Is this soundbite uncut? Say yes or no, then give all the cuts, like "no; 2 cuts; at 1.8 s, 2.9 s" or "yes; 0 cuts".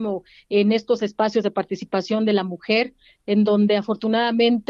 yes; 0 cuts